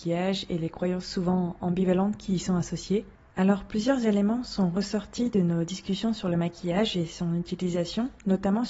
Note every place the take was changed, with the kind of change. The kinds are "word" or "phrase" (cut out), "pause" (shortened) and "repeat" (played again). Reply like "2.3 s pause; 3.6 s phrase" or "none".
none